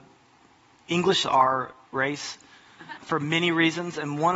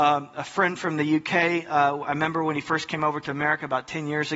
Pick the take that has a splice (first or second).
first